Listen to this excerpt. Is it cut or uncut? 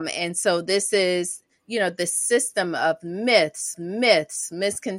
cut